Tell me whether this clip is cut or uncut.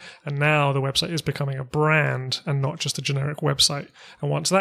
uncut